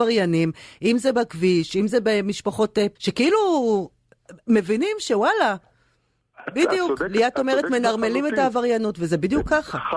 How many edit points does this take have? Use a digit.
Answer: 2